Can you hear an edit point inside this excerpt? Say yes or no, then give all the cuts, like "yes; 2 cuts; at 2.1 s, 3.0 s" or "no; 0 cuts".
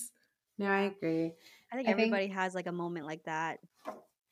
no; 0 cuts